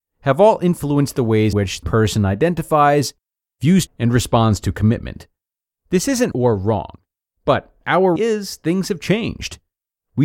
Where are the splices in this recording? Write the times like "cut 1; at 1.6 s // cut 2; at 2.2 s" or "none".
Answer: cut 1; at 1.5 s // cut 2; at 1.8 s // cut 3; at 3.9 s // cut 4; at 6.3 s // cut 5; at 8.2 s